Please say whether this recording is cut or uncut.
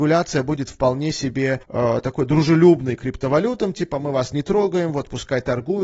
cut